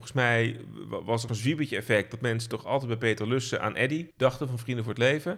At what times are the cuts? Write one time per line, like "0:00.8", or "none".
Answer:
0:01.3
0:04.1